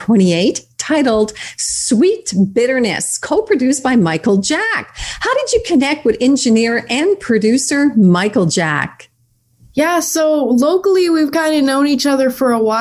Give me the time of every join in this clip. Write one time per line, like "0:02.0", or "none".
none